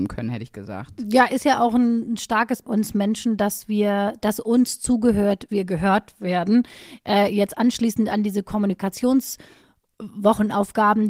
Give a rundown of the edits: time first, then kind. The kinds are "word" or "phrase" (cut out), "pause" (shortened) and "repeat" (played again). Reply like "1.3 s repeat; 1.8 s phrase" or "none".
2.6 s phrase; 5.5 s phrase

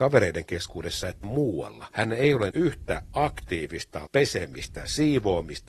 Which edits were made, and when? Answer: 1.2 s word; 1.9 s word; 2.5 s word; 4.1 s word

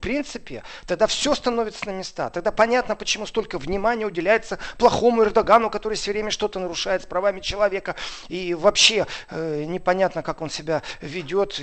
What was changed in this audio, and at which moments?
none

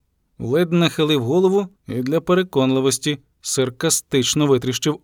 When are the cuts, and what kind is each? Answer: 1.7 s pause

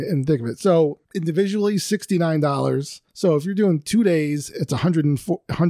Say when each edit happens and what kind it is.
1.0 s pause; 3.1 s pause

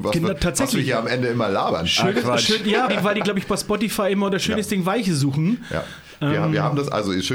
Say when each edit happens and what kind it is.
2.9 s word

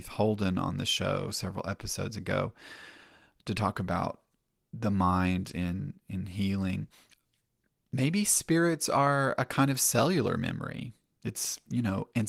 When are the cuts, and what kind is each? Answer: none

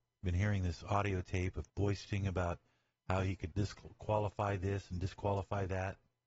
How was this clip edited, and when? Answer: 1.7 s word; 3.5 s word

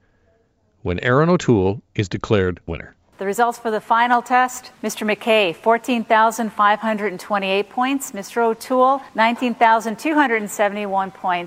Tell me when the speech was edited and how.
2.7 s word; 4.7 s pause; 9.1 s pause

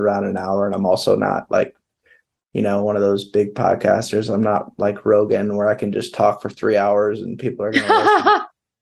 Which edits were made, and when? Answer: none

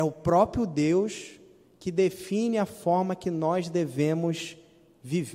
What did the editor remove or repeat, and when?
none

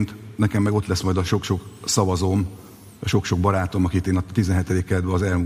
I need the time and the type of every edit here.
none

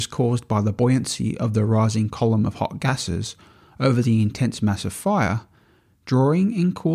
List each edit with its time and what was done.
none

